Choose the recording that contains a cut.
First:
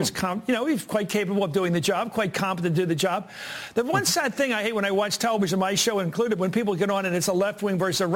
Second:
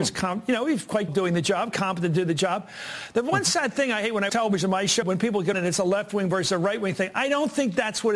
second; 5 cuts; at 1.1 s, 1.7 s, 4.3 s, 5.0 s, 5.5 s

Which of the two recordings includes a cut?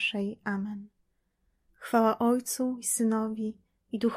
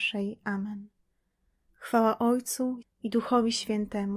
second; 1 cut; at 2.8 s

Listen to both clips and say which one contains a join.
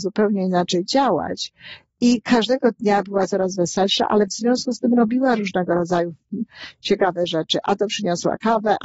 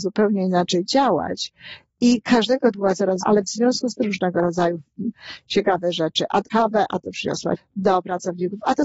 second; 5 cuts; at 2.7 s, 3.2 s, 4.0 s, 6.5 s, 7.6 s

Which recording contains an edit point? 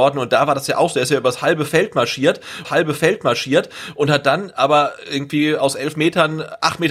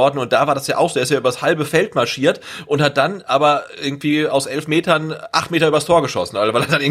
first; 1 cut; at 2.6 s

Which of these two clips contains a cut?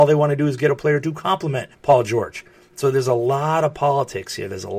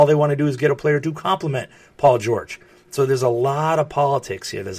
first; 1 cut; at 1.7 s

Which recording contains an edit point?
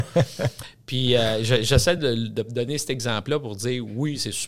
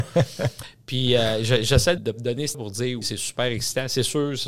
second; 3 cuts; at 2.0 s, 2.5 s, 3.0 s

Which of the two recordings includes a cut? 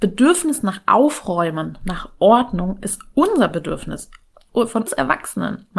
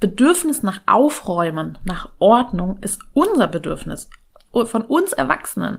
first; 1 cut; at 4.9 s

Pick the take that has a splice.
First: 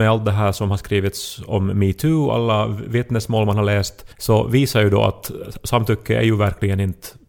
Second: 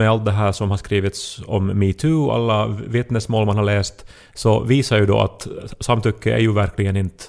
first; 1 cut; at 4.1 s

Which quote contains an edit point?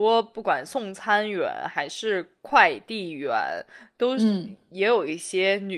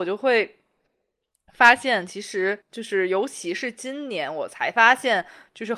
second; 1 cut; at 2.6 s

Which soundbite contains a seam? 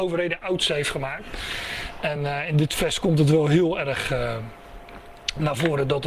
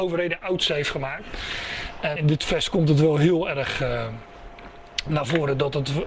second; 1 cut; at 2.2 s

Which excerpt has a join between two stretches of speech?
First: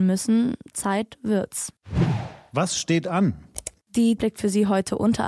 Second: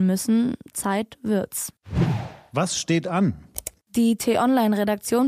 first; 1 cut; at 4.2 s

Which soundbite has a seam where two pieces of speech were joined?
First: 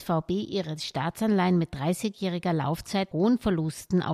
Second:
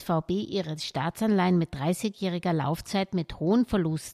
first; 1 cut; at 3.1 s

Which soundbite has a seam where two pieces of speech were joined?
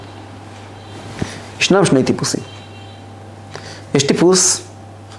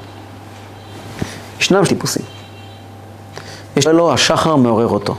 second; 2 cuts; at 1.9 s, 3.9 s

